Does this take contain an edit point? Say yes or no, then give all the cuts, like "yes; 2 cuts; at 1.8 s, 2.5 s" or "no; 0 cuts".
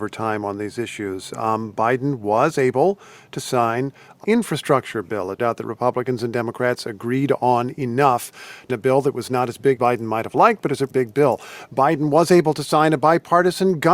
yes; 5 cuts; at 4.2 s, 5.4 s, 8.7 s, 9.8 s, 10.9 s